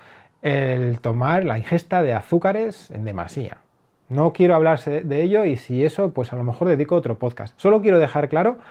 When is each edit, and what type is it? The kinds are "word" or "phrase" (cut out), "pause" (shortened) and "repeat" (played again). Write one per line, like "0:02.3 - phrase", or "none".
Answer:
none